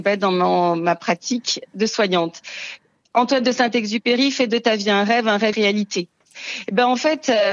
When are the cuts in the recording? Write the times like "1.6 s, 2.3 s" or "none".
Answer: 5.5 s